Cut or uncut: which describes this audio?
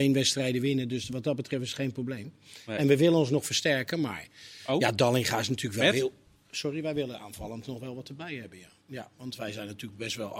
uncut